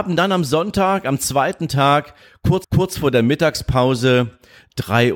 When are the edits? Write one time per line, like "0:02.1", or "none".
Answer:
0:02.6